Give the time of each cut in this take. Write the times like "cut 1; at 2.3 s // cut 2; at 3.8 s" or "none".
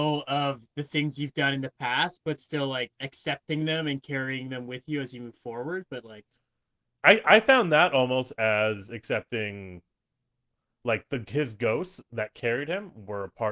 none